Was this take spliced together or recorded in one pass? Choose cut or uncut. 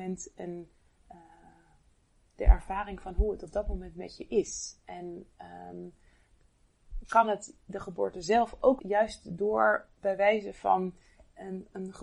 cut